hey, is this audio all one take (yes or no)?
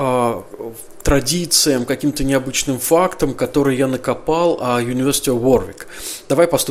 yes